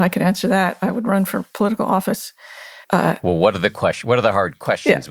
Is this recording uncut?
no; 1 cut; at 2.8 s

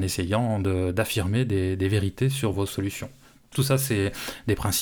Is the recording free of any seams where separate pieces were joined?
yes; 0 cuts

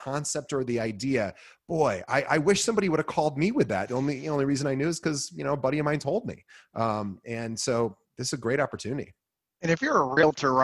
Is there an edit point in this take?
no; 0 cuts

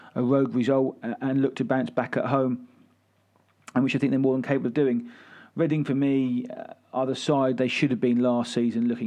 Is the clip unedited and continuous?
yes; 0 cuts

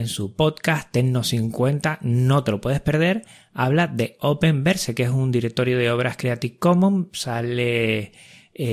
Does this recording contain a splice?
no; 0 cuts

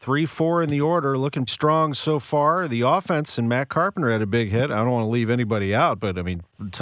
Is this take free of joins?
no; 1 cut; at 1.5 s

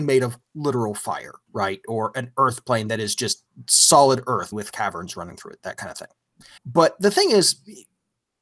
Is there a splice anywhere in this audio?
yes; 2 cuts; at 4.5 s, 6.6 s

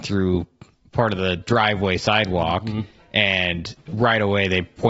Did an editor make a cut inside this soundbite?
no; 0 cuts

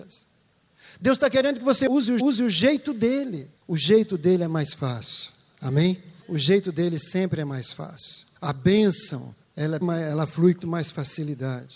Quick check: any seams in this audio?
yes; 6 cuts; at 2.2 s, 3.6 s, 8.4 s, 9.4 s, 9.8 s, 10.6 s

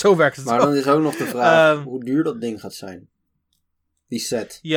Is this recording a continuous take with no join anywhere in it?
yes; 0 cuts

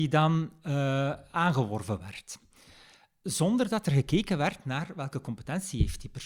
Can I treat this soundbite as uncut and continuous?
yes; 0 cuts

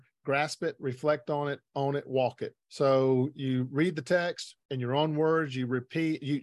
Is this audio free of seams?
no; 2 cuts; at 2.6 s, 4.6 s

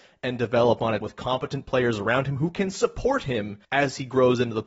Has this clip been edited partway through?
yes; 2 cuts; at 1.0 s, 3.6 s

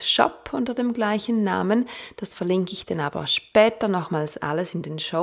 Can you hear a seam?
no; 0 cuts

